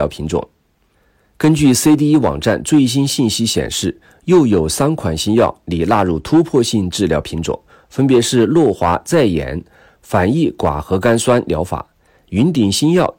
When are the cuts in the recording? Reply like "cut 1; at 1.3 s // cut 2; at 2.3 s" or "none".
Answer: none